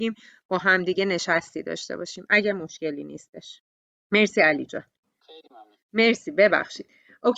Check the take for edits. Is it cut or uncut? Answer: cut